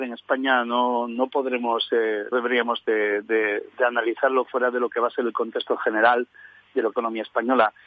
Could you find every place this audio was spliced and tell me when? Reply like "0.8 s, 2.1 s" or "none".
2.3 s, 3.7 s, 6.9 s